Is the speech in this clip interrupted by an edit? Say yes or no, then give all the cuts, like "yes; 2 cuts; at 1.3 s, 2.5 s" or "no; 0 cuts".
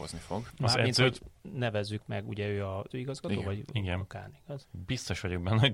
yes; 1 cut; at 2.9 s